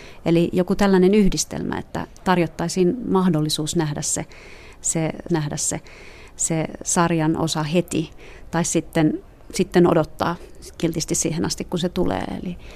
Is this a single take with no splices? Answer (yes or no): no